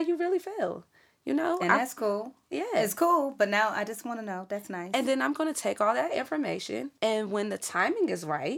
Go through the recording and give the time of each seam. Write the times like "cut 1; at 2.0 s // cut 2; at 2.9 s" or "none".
cut 1; at 7.0 s